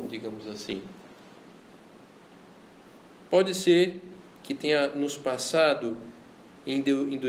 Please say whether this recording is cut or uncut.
uncut